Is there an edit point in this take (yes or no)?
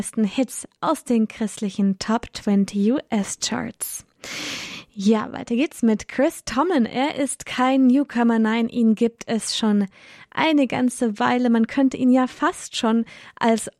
no